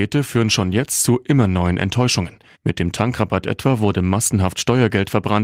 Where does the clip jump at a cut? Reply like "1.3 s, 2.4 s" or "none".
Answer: 2.5 s